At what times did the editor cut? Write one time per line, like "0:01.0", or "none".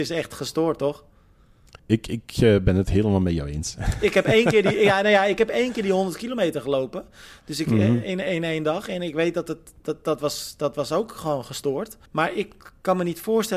0:01.8
0:12.1